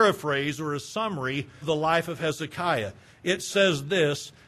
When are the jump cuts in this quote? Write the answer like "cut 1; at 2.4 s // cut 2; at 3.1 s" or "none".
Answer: cut 1; at 1.6 s